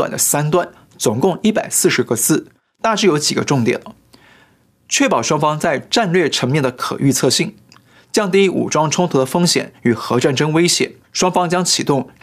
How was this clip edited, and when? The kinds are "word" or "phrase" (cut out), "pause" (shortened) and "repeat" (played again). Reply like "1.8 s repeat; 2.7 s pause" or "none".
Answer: 11.0 s pause